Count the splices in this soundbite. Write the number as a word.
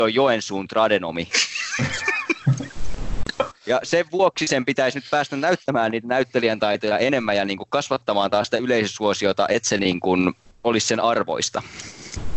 zero